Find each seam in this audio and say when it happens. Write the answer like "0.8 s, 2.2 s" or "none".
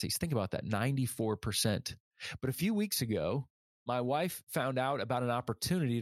none